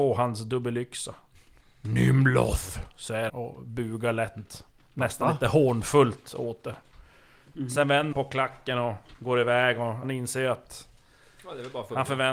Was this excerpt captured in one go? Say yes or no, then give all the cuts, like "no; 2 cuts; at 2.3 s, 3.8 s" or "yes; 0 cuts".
no; 3 cuts; at 3.3 s, 8.1 s, 10.0 s